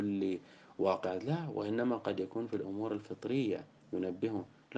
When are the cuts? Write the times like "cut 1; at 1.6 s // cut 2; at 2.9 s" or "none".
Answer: none